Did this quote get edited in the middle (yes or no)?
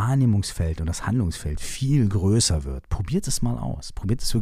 no